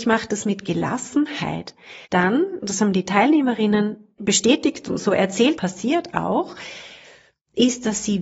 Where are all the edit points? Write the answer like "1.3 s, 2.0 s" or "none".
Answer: 2.0 s, 4.2 s, 5.6 s